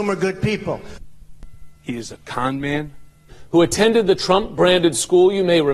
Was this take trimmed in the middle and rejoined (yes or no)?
no